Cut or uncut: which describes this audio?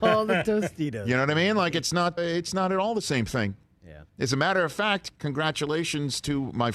cut